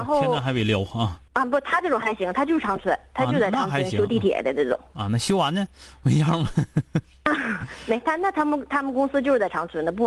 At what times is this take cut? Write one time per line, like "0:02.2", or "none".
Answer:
0:01.3